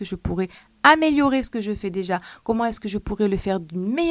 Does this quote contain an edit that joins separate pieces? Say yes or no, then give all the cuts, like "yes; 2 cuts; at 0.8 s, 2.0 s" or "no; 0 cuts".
no; 0 cuts